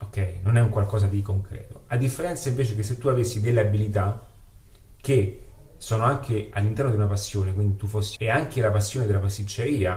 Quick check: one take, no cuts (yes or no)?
no